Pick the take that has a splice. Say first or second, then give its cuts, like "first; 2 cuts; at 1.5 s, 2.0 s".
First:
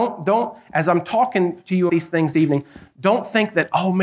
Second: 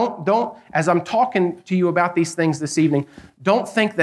first; 2 cuts; at 1.9 s, 2.3 s